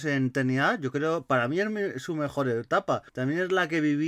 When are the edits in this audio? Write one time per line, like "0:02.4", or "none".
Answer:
0:03.1